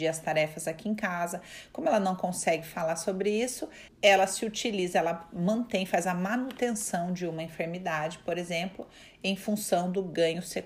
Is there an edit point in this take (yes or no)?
yes